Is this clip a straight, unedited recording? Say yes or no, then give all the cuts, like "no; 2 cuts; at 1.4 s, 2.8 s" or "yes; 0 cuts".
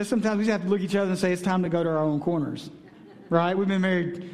yes; 0 cuts